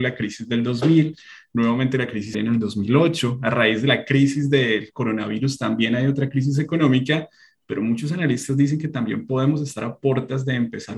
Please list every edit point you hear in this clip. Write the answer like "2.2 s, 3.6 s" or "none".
2.3 s